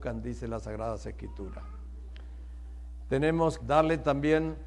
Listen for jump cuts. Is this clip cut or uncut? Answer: cut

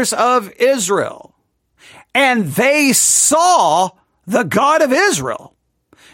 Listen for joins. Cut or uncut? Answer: uncut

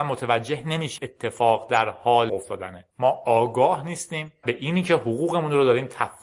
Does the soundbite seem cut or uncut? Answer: cut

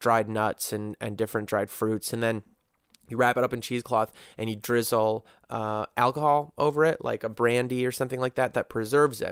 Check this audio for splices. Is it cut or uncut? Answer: uncut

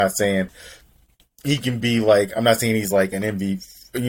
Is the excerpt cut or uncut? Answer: uncut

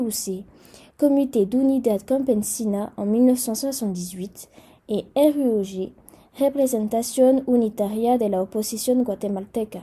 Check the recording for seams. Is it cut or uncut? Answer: uncut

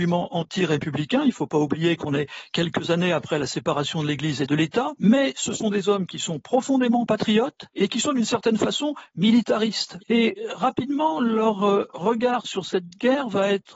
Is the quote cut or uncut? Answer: uncut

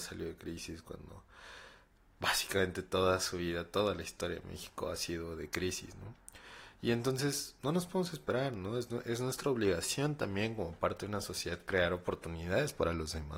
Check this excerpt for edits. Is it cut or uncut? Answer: cut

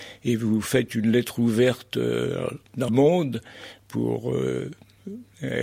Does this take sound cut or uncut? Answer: cut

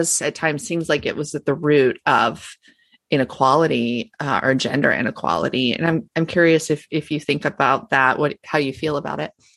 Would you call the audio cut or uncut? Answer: uncut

